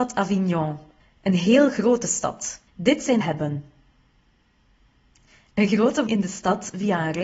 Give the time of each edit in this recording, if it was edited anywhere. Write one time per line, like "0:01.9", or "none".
0:01.0
0:02.7
0:03.2
0:06.1